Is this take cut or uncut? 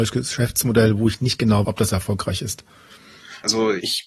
cut